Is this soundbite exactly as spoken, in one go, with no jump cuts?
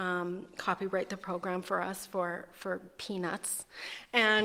yes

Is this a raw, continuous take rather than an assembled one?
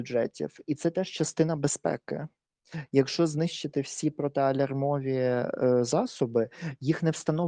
yes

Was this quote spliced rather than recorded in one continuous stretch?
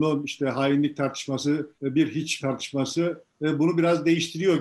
yes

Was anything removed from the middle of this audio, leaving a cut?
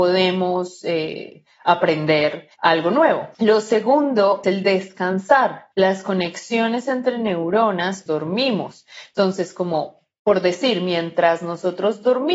yes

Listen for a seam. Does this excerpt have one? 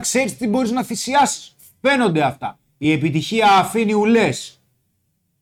no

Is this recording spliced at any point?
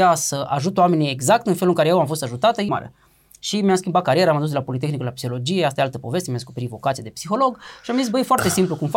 yes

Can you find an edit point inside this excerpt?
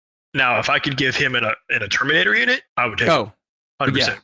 yes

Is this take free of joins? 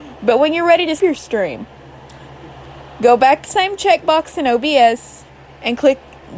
no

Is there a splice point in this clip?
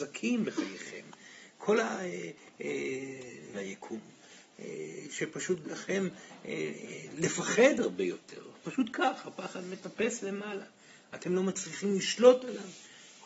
yes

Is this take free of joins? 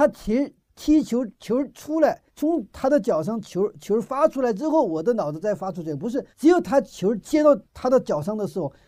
no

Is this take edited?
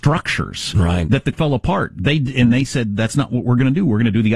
yes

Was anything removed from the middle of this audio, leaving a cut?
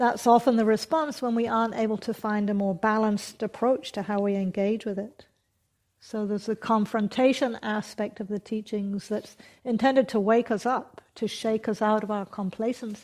no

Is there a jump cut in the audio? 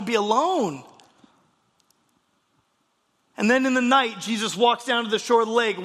no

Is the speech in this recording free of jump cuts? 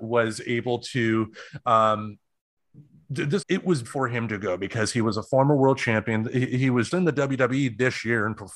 no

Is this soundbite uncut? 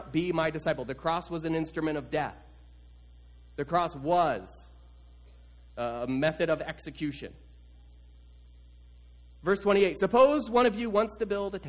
yes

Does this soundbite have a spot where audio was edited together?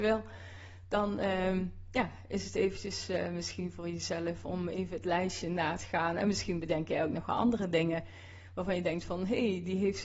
no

